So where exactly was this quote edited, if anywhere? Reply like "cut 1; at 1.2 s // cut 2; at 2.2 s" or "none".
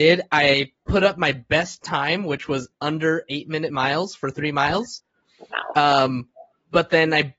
none